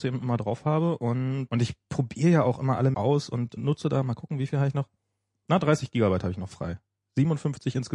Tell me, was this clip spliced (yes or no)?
yes